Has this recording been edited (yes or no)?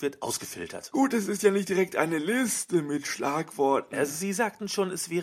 no